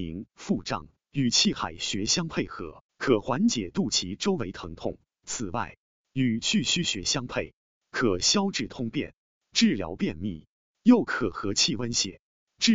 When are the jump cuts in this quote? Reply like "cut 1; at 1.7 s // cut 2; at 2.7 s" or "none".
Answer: cut 1; at 2.9 s